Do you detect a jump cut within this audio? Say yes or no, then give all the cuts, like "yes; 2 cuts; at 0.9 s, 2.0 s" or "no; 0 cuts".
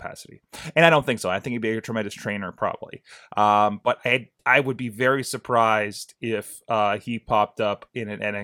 yes; 1 cut; at 4.4 s